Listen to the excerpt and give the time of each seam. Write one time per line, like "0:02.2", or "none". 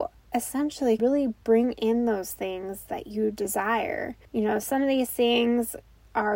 0:01.0
0:04.2